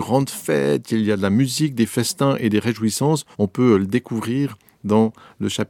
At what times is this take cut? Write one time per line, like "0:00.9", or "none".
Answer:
0:03.3